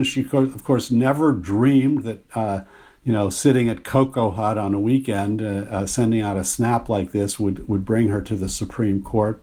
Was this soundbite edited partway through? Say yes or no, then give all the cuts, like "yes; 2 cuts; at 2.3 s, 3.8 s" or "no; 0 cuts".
no; 0 cuts